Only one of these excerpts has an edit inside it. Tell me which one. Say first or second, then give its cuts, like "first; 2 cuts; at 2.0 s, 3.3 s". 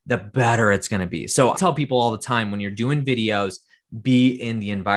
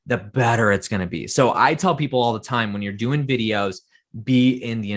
first; 1 cut; at 1.5 s